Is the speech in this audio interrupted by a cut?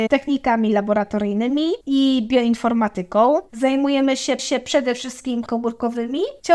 yes; 2 cuts; at 4.4 s, 5.5 s

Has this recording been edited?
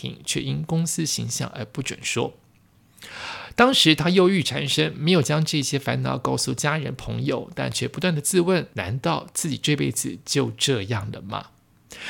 yes; 1 cut; at 8.7 s

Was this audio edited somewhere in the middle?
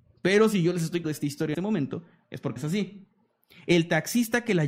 yes; 3 cuts; at 1.0 s, 1.5 s, 2.6 s

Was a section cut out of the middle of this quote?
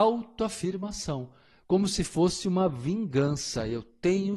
no; 0 cuts

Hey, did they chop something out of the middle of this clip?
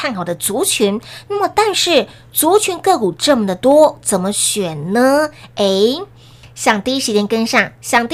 no; 0 cuts

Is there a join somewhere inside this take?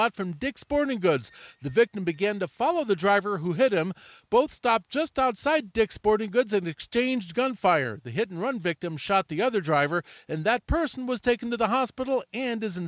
no; 0 cuts

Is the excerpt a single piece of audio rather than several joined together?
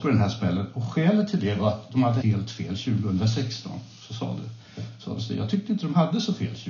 no; 1 cut; at 2.2 s

